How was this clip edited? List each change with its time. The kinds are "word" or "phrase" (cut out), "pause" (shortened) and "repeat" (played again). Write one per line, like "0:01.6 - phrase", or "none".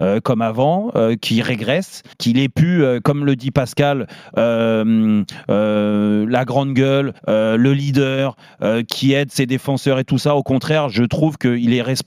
0:02.1 - pause
0:07.2 - pause